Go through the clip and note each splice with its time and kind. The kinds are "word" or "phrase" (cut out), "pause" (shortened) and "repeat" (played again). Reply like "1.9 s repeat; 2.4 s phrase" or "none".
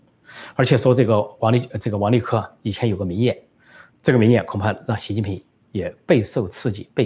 none